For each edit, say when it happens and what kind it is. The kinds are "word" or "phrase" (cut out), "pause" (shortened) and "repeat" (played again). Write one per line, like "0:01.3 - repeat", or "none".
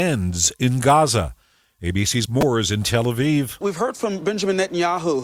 0:02.3 - word